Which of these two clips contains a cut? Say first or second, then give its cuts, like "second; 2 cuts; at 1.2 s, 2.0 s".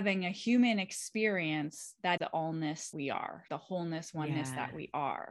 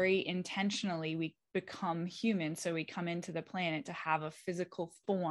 first; 3 cuts; at 2.2 s, 2.9 s, 3.5 s